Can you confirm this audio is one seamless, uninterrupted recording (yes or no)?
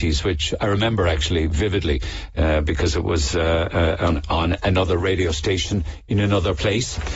yes